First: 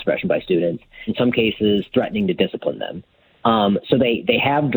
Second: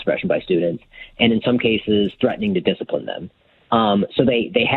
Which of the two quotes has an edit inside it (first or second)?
first